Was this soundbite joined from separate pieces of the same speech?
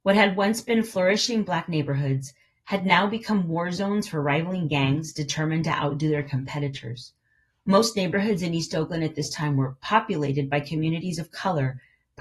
no; 0 cuts

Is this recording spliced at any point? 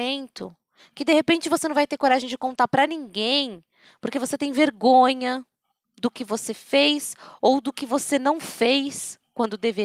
no; 0 cuts

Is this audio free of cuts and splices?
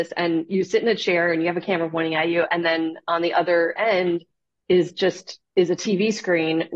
yes; 0 cuts

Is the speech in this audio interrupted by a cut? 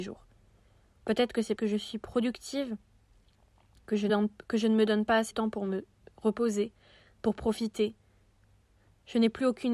yes; 3 cuts; at 1.6 s, 4.1 s, 5.3 s

